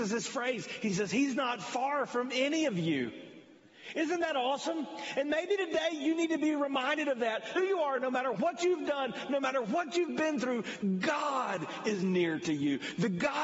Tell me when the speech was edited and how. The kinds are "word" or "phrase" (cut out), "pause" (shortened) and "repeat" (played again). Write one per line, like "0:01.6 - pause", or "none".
0:07.6 - phrase